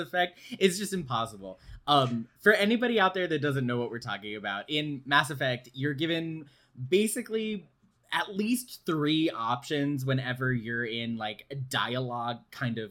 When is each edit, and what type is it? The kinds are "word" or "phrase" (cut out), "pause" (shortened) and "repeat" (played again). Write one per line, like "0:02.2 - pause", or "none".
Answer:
none